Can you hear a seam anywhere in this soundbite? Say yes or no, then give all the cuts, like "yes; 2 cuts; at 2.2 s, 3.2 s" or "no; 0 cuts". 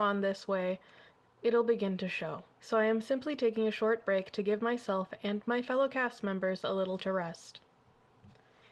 yes; 2 cuts; at 2.5 s, 7.0 s